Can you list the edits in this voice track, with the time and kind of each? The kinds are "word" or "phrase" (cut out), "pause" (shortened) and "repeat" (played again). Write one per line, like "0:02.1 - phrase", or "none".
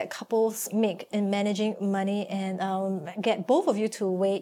none